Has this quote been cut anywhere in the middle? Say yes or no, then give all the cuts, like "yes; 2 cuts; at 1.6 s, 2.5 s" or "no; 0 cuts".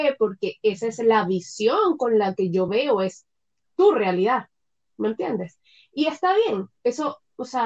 no; 0 cuts